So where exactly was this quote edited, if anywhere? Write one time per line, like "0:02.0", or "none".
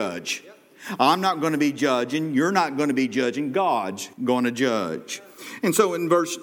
0:04.1